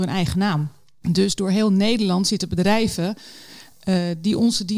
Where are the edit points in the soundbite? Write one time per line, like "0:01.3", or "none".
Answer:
none